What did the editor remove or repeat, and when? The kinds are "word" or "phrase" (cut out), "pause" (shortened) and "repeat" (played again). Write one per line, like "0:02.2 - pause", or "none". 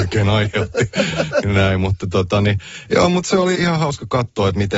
0:03.5 - word